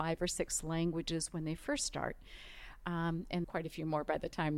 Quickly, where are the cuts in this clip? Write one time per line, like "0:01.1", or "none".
0:03.4